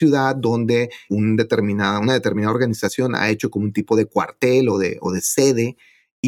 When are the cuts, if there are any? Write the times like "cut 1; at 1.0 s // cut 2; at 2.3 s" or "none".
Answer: cut 1; at 1.1 s

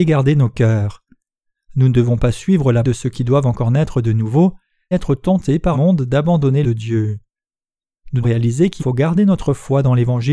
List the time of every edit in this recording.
cut 1; at 2.8 s // cut 2; at 4.9 s // cut 3; at 5.7 s // cut 4; at 6.6 s // cut 5; at 8.2 s // cut 6; at 8.8 s

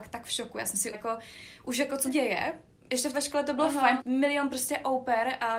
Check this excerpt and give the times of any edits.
cut 1; at 0.9 s // cut 2; at 2.1 s // cut 3; at 3.1 s // cut 4; at 4.0 s

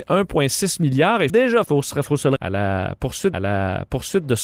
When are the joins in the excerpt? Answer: cut 1; at 1.3 s // cut 2; at 1.6 s // cut 3; at 2.4 s // cut 4; at 3.3 s

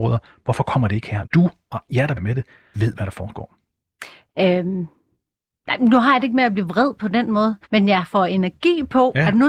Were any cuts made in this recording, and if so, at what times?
cut 1; at 1.2 s // cut 2; at 2.2 s // cut 3; at 2.7 s // cut 4; at 7.6 s

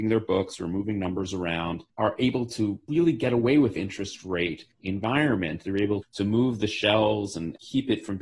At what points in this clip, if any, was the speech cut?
cut 1; at 3.8 s // cut 2; at 4.7 s // cut 3; at 6.0 s

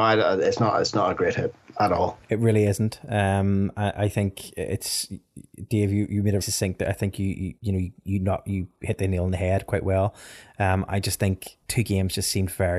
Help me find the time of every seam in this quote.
cut 1; at 2.2 s // cut 2; at 6.4 s // cut 3; at 7.6 s // cut 4; at 11.6 s

